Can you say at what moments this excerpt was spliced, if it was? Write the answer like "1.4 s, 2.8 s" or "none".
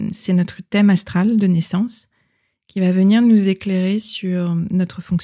none